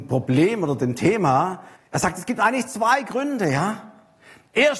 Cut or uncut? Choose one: cut